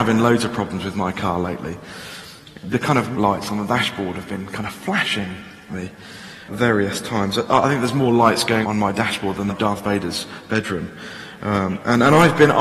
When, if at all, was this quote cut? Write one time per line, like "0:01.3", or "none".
0:02.7
0:03.1
0:05.7
0:06.5
0:08.6
0:09.5